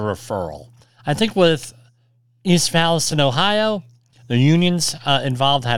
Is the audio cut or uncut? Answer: uncut